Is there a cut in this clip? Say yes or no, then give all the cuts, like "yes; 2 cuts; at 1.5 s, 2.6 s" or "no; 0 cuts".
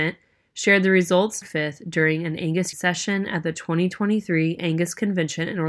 yes; 2 cuts; at 1.4 s, 2.7 s